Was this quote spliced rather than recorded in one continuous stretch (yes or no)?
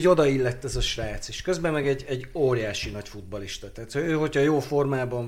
no